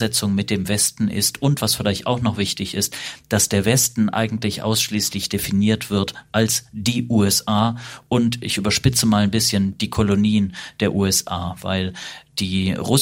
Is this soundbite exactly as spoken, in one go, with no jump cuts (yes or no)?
yes